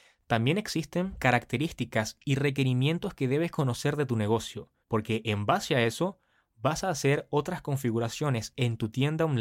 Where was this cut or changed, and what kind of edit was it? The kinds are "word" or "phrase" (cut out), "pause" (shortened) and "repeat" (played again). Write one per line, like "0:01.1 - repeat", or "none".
0:04.8 - pause